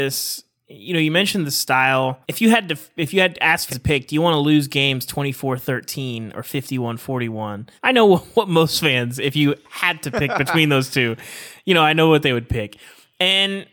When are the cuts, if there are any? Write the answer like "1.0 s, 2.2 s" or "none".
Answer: 2.2 s, 3.7 s, 7.8 s